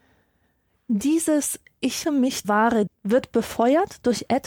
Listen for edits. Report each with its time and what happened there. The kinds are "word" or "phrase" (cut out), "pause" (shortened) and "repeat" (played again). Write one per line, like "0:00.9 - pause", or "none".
0:02.0 - word
0:02.4 - word
0:02.9 - word